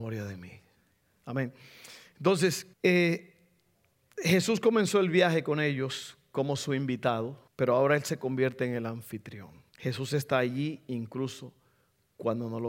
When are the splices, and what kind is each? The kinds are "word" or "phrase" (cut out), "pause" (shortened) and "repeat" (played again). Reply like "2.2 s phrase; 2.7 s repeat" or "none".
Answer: 2.7 s pause; 7.5 s pause; 9.7 s pause